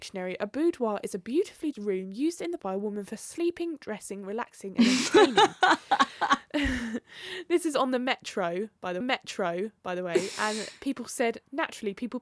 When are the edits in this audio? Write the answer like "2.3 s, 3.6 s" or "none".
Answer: 1.7 s, 2.6 s, 9.0 s